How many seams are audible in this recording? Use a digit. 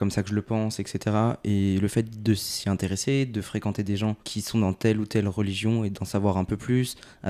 1